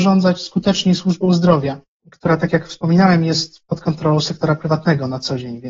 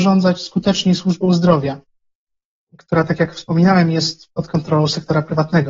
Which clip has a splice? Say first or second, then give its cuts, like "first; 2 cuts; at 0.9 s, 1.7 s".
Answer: first; 1 cut; at 1.9 s